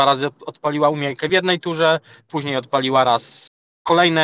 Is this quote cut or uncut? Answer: uncut